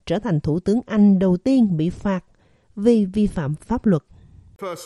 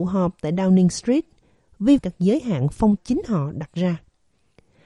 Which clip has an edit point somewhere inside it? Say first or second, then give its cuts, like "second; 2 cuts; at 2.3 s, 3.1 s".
second; 2 cuts; at 2.0 s, 3.0 s